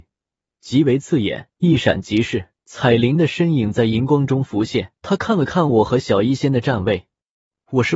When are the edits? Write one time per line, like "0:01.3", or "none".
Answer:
0:01.5
0:02.6
0:05.0